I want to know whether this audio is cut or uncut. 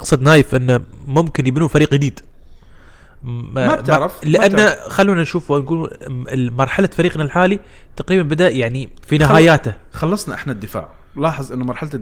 uncut